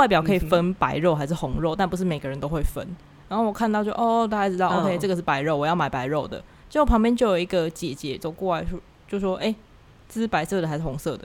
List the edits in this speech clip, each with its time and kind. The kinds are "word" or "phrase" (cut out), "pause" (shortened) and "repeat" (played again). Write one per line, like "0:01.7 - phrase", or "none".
none